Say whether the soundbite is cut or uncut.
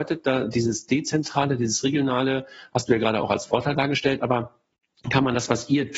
uncut